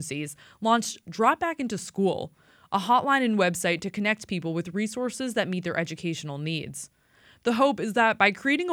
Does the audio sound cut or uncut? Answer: uncut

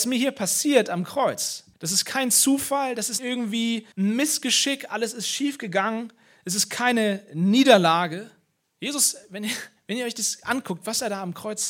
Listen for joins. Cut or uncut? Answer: cut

